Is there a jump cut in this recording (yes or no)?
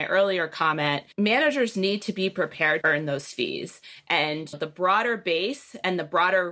yes